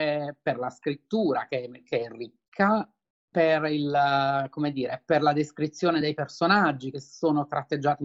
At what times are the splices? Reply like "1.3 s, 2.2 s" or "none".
none